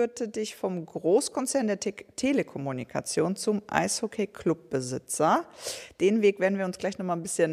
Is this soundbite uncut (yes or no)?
yes